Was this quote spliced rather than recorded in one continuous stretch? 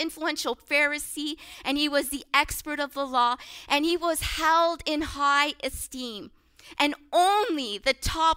no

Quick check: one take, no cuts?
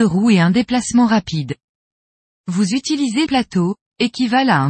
no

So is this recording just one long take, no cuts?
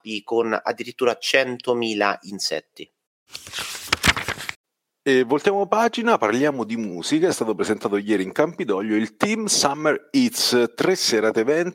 yes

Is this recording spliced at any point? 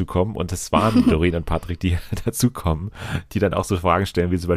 no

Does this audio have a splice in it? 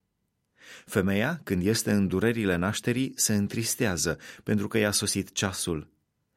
no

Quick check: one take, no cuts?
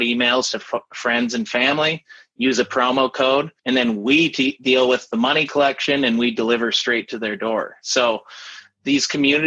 no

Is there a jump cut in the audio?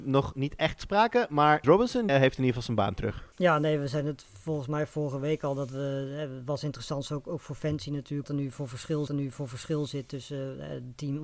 yes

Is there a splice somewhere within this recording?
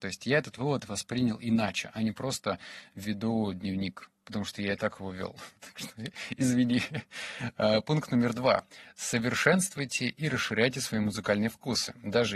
yes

